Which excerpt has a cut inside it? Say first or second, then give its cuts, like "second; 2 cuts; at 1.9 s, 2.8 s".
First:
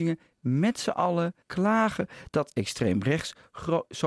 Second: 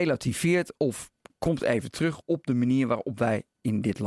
first; 1 cut; at 1.4 s